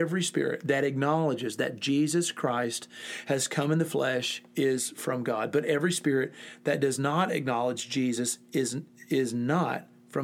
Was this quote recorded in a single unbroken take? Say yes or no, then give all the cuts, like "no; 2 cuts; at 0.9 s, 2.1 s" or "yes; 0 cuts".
yes; 0 cuts